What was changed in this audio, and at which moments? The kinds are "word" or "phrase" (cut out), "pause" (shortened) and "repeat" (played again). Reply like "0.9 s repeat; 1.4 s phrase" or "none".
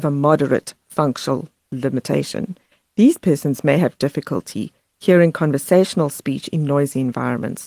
none